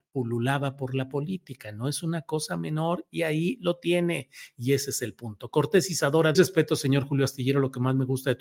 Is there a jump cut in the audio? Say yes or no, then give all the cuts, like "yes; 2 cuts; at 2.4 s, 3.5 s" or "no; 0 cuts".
yes; 1 cut; at 6.3 s